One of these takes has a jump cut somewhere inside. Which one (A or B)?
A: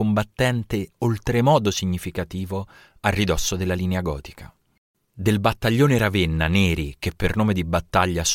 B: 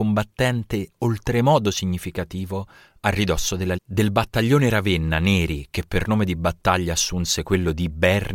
B